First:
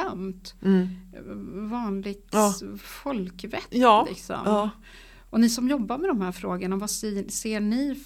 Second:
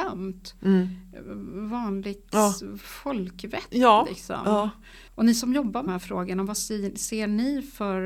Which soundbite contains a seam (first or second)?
second